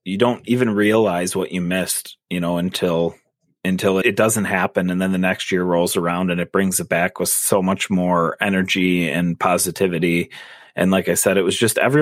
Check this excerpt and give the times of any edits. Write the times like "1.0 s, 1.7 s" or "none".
4.0 s